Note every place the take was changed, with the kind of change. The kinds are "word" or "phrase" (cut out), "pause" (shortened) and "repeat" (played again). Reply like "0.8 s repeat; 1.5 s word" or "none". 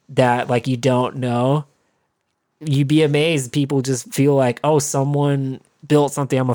none